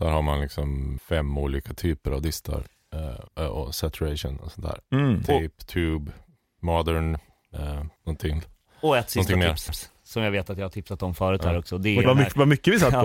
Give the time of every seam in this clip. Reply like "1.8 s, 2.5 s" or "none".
1.0 s, 3.3 s, 4.8 s, 8.0 s, 9.7 s, 12.0 s

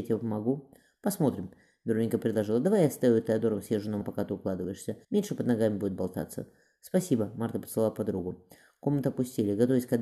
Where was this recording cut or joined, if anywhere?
4.0 s, 5.0 s

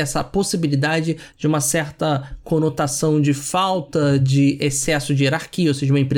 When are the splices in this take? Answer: 1.3 s

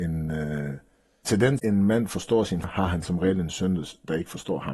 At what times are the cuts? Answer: 1.2 s, 1.6 s, 2.6 s

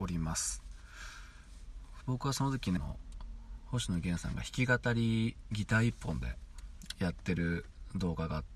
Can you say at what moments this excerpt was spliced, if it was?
2.8 s

